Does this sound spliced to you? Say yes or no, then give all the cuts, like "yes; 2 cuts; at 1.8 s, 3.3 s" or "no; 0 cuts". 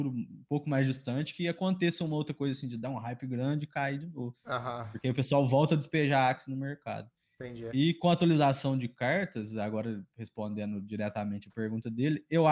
no; 0 cuts